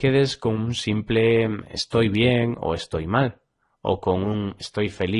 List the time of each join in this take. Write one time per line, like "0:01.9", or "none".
none